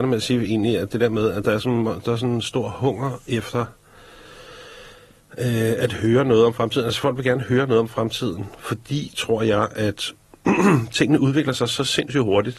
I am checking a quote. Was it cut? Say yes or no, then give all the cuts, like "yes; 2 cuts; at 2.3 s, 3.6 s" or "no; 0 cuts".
no; 0 cuts